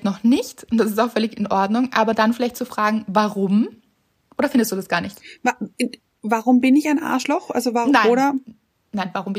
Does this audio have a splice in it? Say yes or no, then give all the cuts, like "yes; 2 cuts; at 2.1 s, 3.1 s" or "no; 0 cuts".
no; 0 cuts